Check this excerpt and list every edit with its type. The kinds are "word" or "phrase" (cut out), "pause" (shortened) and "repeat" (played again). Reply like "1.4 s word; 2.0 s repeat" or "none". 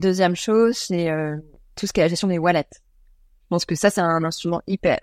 none